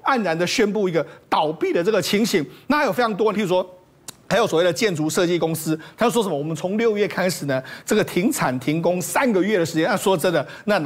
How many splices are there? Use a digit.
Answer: 1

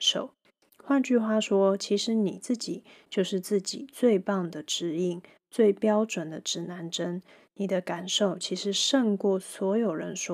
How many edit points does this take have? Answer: 0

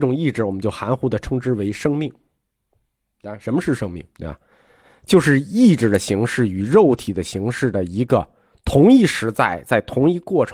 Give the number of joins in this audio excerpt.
1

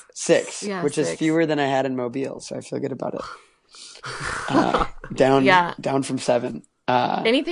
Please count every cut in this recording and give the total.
0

